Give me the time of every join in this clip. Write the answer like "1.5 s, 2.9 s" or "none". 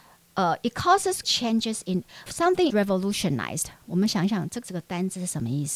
1.2 s, 2.3 s, 2.7 s, 4.6 s